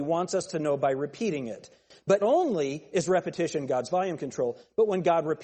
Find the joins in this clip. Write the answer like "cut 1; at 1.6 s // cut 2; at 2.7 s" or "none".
cut 1; at 2.2 s